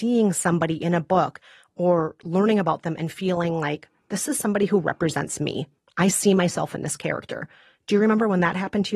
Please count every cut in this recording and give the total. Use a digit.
0